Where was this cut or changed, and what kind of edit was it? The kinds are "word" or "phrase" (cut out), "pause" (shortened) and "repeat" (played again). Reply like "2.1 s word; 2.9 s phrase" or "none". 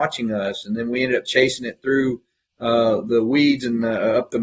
none